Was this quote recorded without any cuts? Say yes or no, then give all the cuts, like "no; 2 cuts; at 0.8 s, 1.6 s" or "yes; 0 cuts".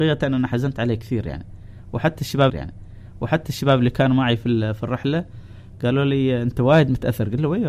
no; 1 cut; at 2.5 s